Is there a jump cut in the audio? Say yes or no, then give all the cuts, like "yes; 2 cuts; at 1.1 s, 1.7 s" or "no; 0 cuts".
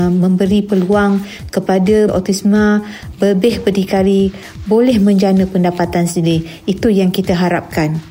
yes; 1 cut; at 2.1 s